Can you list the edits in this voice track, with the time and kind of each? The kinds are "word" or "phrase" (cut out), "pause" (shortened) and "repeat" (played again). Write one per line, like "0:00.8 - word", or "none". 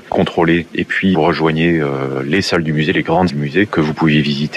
0:01.1 - word
0:03.3 - word